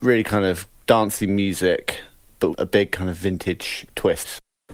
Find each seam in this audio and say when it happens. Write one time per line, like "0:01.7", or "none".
0:02.5